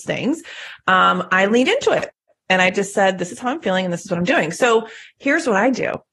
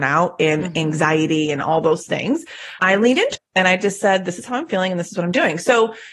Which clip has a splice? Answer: second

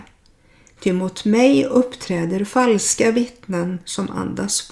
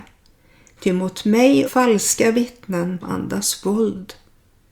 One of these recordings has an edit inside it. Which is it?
second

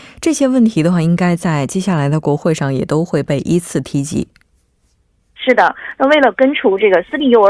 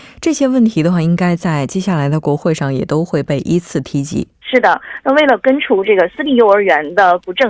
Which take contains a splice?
second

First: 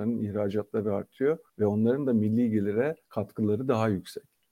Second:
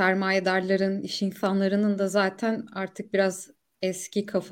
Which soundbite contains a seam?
first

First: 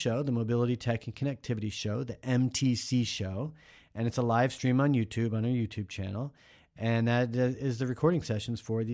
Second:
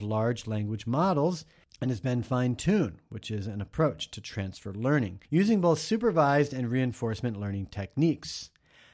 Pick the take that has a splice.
second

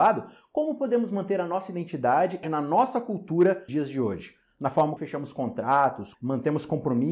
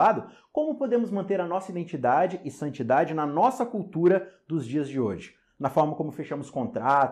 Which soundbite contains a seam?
first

